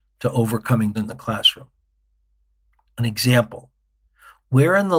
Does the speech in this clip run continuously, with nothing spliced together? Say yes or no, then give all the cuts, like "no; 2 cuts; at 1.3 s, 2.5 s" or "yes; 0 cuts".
no; 1 cut; at 0.9 s